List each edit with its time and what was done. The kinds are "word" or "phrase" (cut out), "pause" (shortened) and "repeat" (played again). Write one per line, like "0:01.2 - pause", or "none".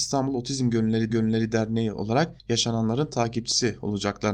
0:01.1 - repeat
0:02.4 - pause